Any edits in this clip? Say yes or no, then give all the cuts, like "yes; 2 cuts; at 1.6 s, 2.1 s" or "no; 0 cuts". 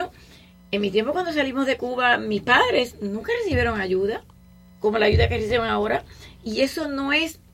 no; 0 cuts